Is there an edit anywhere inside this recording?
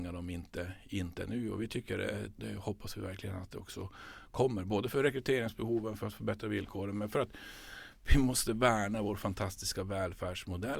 yes; 1 cut; at 2.4 s

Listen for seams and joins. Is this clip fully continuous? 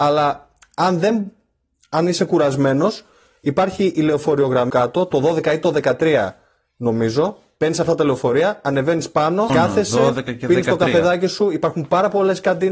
no; 2 cuts; at 4.7 s, 9.5 s

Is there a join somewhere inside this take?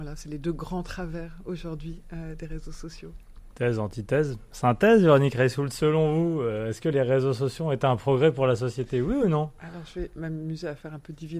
no; 0 cuts

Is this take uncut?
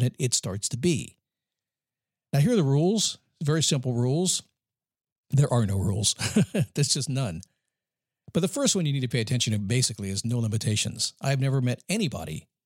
yes; 0 cuts

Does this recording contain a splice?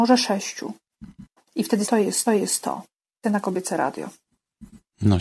yes; 4 cuts; at 1.4 s, 1.8 s, 2.3 s, 3.2 s

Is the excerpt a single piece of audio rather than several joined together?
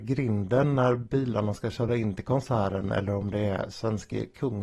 yes; 0 cuts

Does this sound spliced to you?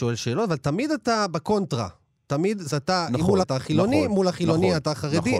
yes; 2 cuts; at 2.7 s, 3.4 s

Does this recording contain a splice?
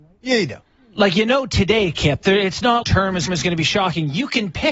yes; 2 cuts; at 2.8 s, 3.3 s

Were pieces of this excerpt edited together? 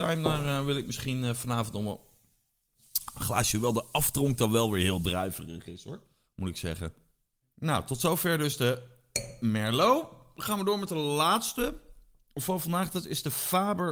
no; 0 cuts

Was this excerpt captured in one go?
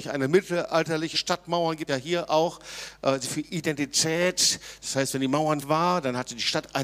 no; 4 cuts; at 1.1 s, 1.9 s, 3.2 s, 5.6 s

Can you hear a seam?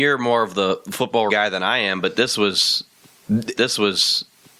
yes; 2 cuts; at 1.3 s, 3.6 s

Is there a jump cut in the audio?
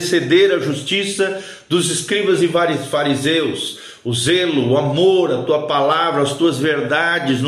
no; 0 cuts

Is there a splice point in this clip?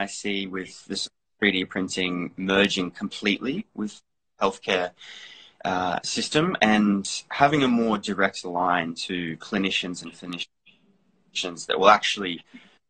no; 0 cuts

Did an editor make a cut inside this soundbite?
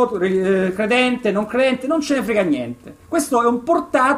no; 0 cuts

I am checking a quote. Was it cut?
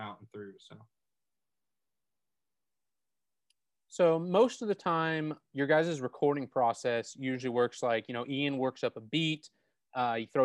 no; 0 cuts

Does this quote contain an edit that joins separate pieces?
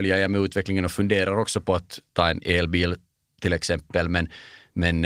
no; 0 cuts

